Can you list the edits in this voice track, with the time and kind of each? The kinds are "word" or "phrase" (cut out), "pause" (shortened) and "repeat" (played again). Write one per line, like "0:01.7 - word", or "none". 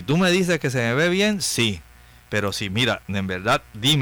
none